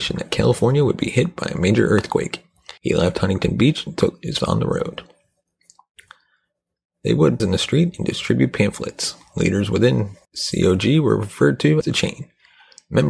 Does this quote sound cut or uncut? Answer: cut